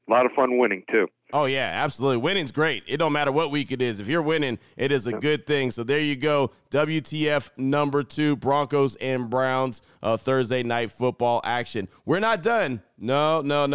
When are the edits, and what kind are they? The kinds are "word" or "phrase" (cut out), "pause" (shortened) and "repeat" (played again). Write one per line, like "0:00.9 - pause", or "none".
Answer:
none